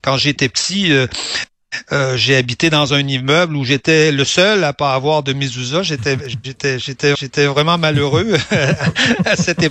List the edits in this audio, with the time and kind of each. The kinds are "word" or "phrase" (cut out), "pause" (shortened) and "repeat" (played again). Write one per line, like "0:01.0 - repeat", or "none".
0:07.1 - repeat